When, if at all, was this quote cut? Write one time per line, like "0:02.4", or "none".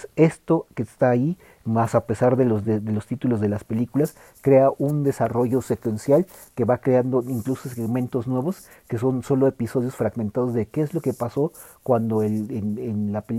none